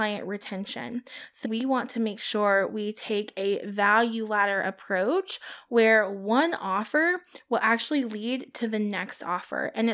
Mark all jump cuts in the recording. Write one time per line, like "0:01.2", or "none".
0:01.4

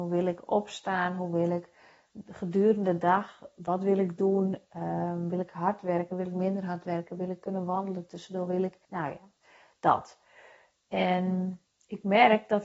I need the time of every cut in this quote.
0:08.8

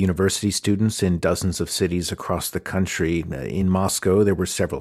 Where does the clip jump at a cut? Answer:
none

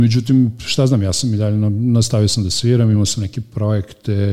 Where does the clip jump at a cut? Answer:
none

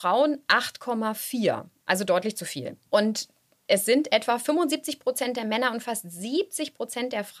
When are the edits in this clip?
0:02.9

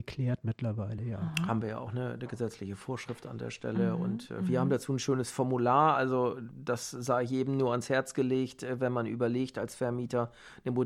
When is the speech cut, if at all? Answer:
none

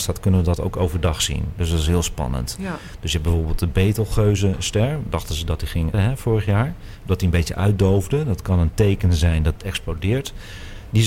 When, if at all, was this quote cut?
0:05.9
0:09.5

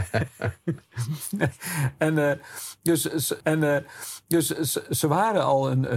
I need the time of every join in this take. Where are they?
0:03.4

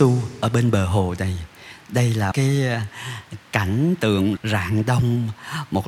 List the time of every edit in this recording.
0:02.3
0:04.4

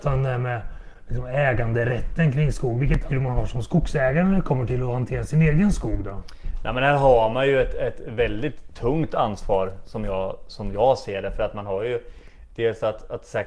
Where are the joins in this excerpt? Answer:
0:03.1

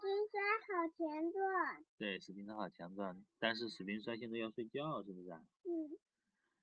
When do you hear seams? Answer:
0:01.9

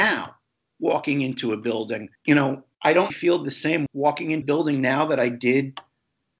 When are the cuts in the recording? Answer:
0:02.1
0:02.7
0:03.1
0:03.9
0:04.4

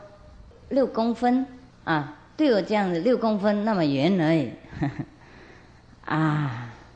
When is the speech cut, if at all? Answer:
0:01.7

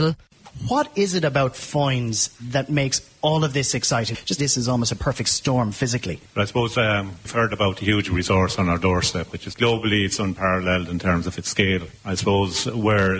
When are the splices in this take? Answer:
0:04.4
0:09.5

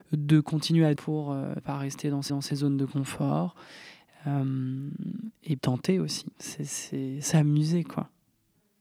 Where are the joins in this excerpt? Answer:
0:01.0
0:01.6
0:02.3
0:05.6
0:06.3

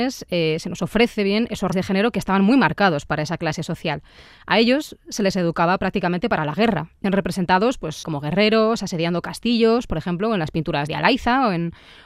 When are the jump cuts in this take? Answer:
0:01.7
0:07.0
0:08.0
0:10.9

